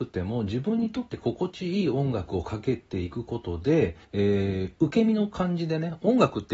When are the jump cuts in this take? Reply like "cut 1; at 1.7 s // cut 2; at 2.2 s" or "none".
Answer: cut 1; at 4.0 s